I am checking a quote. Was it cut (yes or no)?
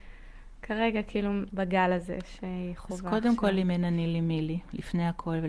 yes